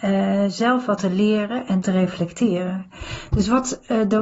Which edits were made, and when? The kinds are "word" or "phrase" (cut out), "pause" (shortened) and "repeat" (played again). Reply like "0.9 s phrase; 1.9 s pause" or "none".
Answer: 1.0 s word; 1.8 s word